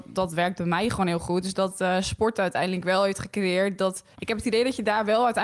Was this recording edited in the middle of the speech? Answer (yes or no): yes